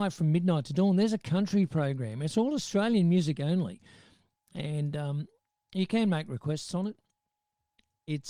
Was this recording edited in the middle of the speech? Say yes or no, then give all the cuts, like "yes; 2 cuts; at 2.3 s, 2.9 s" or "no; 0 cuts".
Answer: no; 0 cuts